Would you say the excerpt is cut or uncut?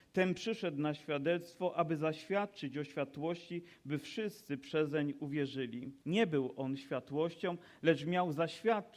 cut